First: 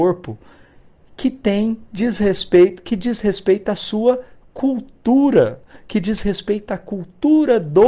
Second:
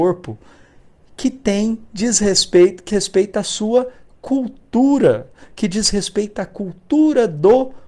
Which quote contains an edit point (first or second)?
second